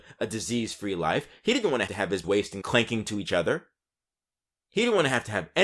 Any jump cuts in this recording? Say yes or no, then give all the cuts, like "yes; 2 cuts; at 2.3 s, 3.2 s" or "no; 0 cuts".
yes; 3 cuts; at 1.9 s, 2.2 s, 2.6 s